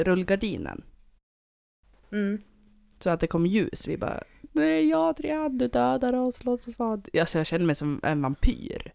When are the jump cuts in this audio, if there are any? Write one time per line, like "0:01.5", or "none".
none